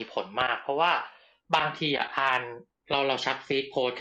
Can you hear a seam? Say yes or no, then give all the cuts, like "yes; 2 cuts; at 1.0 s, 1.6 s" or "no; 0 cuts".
no; 0 cuts